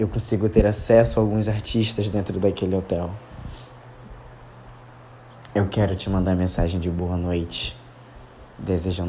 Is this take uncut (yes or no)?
yes